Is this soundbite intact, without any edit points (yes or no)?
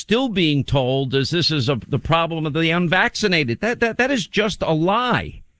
yes